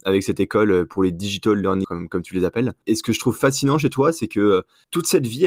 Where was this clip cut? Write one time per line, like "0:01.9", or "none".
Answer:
0:01.8
0:02.8